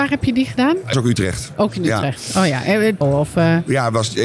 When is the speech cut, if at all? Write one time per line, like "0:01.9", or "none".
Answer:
0:00.9
0:03.0